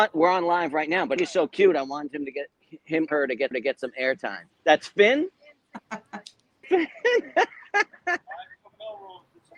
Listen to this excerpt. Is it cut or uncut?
cut